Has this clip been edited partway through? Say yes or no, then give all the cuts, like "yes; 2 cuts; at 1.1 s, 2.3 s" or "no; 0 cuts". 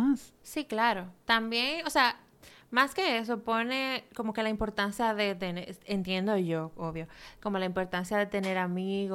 no; 0 cuts